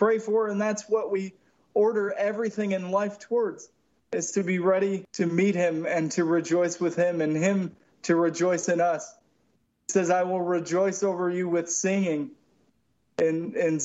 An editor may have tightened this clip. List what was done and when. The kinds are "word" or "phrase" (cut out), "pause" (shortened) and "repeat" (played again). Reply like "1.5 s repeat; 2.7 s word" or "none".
none

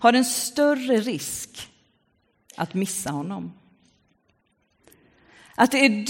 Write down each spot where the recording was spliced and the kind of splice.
none

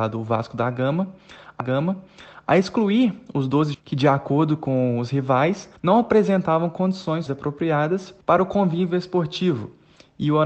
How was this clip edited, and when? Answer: 1.6 s repeat; 3.7 s word; 5.8 s pause; 7.3 s word; 8.2 s pause

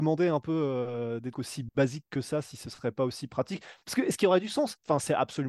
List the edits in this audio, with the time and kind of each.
1.3 s word

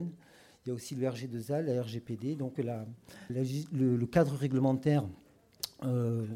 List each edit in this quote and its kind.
2.6 s phrase; 3.3 s word

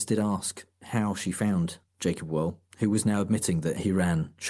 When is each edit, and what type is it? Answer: 1.9 s pause

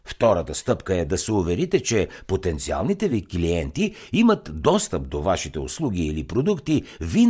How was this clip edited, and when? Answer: none

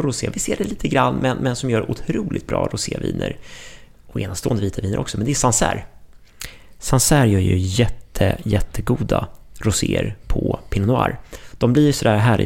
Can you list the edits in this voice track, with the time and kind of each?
none

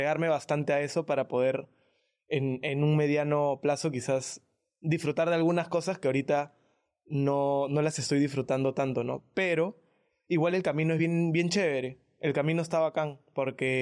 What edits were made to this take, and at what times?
none

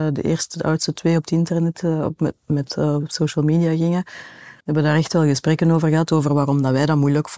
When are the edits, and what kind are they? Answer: 4.6 s pause

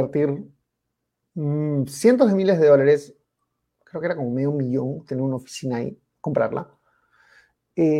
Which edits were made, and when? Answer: 6.1 s pause

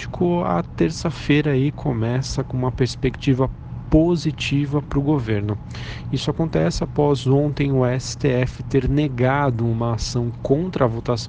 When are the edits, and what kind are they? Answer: none

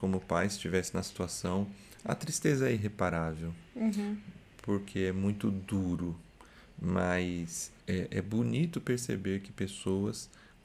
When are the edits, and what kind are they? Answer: 7.8 s pause

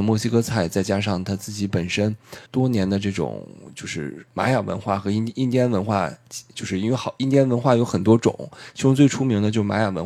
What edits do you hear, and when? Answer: 2.5 s word; 4.3 s pause

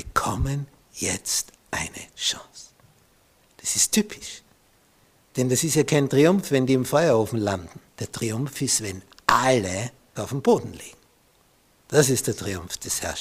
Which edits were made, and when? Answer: 2.1 s word; 7.9 s pause; 10.2 s word

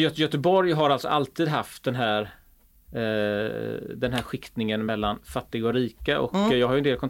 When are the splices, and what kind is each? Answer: none

